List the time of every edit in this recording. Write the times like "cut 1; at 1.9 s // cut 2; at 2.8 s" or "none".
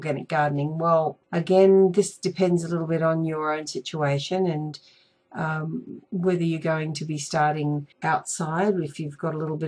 cut 1; at 1.2 s // cut 2; at 6.1 s // cut 3; at 7.9 s